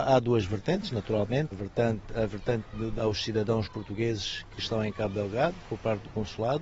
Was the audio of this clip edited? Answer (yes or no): yes